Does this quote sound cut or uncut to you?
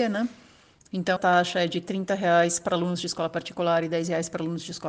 cut